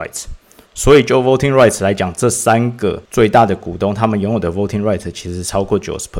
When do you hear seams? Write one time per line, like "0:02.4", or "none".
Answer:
0:03.0